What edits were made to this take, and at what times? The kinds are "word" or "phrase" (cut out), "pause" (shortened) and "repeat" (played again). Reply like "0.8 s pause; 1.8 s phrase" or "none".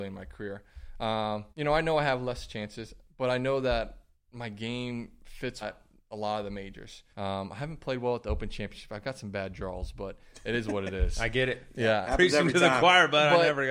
1.5 s pause; 5.6 s word; 7.1 s pause